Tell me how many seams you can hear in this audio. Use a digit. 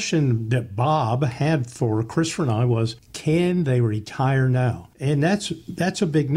0